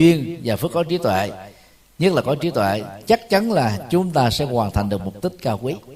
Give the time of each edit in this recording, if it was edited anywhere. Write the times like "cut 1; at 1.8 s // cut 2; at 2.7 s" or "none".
none